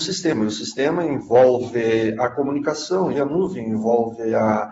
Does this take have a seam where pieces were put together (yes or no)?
yes